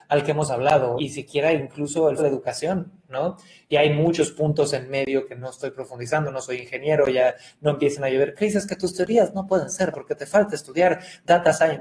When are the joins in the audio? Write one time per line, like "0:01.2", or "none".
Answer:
0:01.0
0:02.2
0:09.9